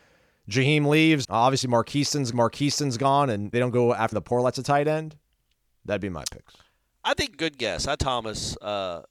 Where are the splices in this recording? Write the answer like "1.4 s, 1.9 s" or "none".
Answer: 1.2 s, 2.3 s, 3.5 s, 4.1 s, 7.3 s, 8.0 s